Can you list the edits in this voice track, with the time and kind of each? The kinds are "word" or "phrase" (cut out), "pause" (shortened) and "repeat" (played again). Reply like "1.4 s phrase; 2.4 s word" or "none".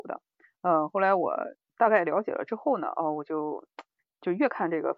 none